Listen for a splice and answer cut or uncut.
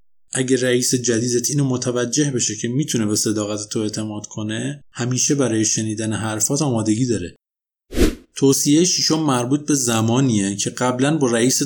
cut